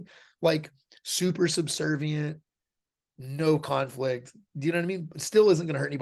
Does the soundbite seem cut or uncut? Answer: uncut